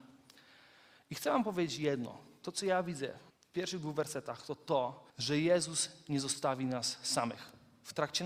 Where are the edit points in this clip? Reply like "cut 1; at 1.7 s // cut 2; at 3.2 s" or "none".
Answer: cut 1; at 3.3 s // cut 2; at 5.1 s